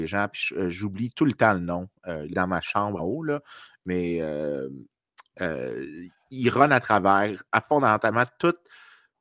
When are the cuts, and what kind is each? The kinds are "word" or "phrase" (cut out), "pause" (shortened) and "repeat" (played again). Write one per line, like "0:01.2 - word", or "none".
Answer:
0:02.3 - phrase
0:03.0 - word